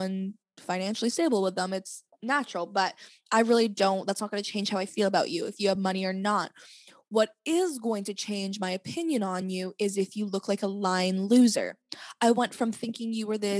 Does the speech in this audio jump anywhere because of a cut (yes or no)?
no